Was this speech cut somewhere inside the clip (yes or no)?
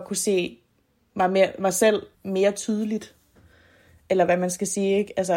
yes